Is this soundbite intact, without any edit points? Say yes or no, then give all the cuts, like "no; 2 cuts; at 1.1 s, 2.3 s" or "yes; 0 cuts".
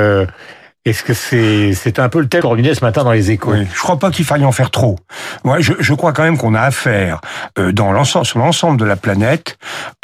no; 1 cut; at 2.4 s